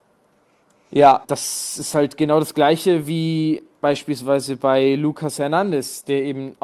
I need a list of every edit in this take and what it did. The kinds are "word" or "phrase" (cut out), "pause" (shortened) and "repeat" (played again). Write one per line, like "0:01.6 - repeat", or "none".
0:01.2 - word